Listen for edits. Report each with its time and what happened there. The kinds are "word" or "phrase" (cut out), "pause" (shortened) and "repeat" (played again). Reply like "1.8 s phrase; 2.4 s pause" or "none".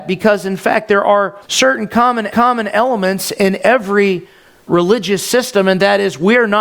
1.4 s pause; 2.3 s repeat; 4.7 s word